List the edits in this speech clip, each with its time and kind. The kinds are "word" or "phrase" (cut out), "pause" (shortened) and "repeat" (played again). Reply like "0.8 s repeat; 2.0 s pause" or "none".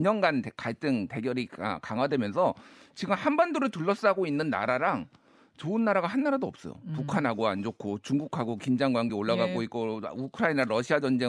none